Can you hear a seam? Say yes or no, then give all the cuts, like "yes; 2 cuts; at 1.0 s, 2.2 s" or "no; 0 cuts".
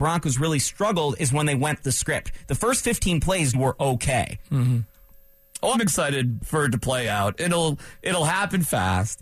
yes; 3 cuts; at 1.8 s, 3.5 s, 5.7 s